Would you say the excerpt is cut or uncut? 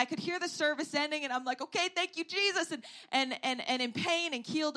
uncut